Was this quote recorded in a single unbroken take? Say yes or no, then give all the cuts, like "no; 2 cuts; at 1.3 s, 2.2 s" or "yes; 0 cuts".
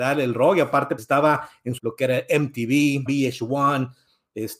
no; 3 cuts; at 1.0 s, 1.8 s, 3.1 s